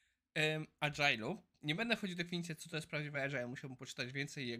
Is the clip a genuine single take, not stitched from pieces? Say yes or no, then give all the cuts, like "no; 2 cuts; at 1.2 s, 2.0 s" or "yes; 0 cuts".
yes; 0 cuts